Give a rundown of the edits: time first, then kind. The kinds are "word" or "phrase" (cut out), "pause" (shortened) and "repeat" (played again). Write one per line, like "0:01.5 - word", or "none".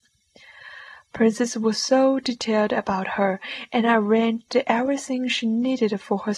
none